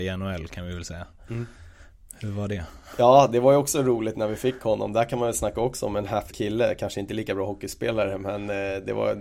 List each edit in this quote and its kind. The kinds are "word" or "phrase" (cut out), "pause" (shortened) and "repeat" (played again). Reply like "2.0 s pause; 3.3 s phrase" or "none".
6.3 s word